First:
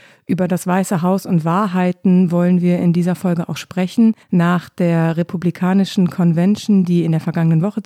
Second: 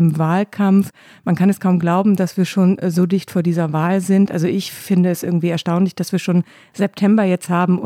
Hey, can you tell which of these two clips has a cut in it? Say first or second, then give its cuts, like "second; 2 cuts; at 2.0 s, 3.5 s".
first; 1 cut; at 4.2 s